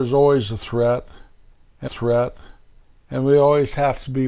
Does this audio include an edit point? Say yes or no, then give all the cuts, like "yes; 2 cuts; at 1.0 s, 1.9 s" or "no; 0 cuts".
yes; 1 cut; at 1.9 s